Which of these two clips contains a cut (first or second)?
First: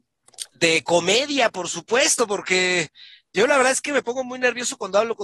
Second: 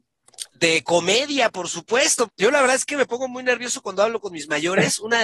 second